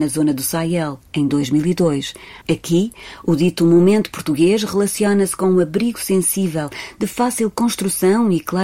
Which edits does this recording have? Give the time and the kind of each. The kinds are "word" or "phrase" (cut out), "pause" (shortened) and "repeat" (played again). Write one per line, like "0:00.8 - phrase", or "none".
0:02.4 - pause